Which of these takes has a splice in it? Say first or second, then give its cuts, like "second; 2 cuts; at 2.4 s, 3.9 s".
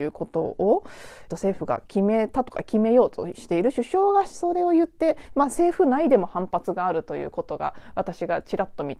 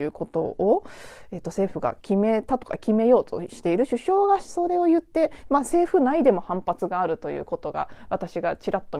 first; 1 cut; at 1.3 s